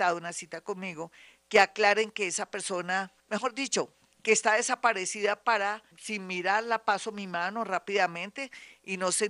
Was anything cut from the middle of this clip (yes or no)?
yes